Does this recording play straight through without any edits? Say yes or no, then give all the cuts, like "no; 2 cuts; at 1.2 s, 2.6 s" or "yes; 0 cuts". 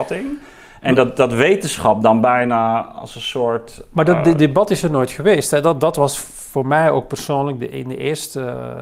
yes; 0 cuts